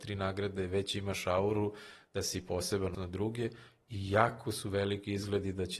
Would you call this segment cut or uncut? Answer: cut